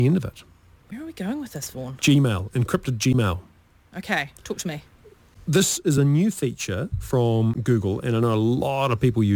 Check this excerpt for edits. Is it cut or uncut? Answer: uncut